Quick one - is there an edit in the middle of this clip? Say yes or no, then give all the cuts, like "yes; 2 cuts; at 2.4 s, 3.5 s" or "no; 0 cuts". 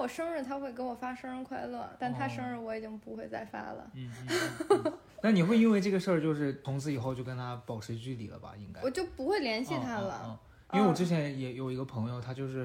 no; 0 cuts